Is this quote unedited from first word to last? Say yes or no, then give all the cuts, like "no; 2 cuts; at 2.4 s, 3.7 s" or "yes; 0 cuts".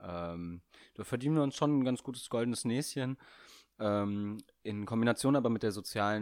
yes; 0 cuts